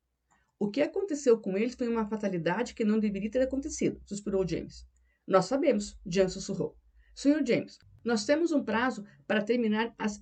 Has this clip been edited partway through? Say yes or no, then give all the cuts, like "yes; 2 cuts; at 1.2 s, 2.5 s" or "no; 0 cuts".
no; 0 cuts